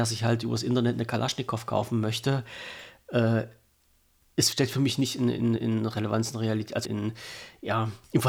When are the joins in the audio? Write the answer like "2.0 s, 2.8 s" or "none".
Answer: 4.5 s, 5.6 s, 6.8 s